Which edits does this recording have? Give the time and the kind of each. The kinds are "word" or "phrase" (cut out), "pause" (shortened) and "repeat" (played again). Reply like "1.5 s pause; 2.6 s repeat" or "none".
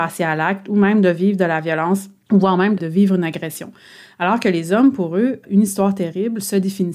none